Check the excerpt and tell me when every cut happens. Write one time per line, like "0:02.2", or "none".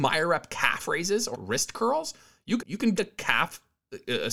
0:01.3
0:02.6
0:03.0